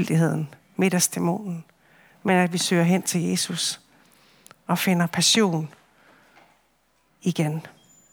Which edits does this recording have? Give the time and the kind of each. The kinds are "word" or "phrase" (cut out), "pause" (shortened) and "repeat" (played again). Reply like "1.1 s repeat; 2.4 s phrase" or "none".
none